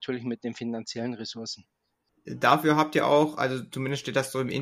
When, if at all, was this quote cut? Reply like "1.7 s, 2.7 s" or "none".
none